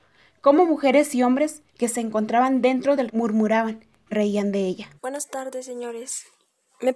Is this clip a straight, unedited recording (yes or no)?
no